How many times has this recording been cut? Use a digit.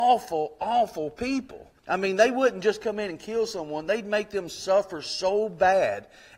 1